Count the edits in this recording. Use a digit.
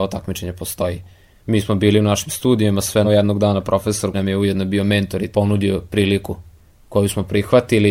3